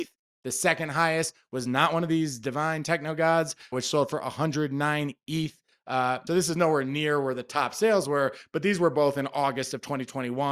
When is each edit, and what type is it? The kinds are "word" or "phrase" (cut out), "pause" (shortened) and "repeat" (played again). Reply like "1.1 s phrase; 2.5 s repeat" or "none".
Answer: 3.7 s word; 6.3 s word